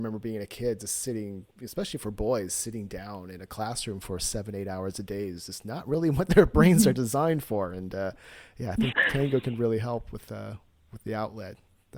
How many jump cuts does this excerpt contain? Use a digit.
2